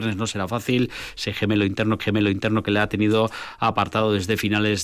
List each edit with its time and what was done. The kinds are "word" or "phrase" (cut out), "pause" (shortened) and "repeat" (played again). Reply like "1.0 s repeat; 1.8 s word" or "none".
2.0 s repeat